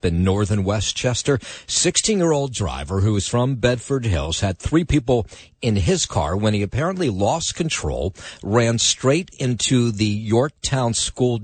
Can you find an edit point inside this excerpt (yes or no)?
no